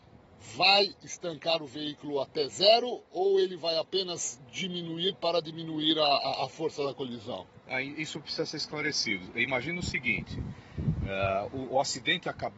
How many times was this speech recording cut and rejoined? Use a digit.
0